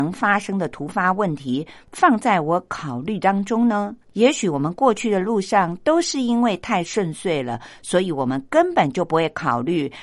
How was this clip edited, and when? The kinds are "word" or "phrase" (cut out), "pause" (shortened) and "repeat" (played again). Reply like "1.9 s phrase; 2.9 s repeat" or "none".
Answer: 4.0 s pause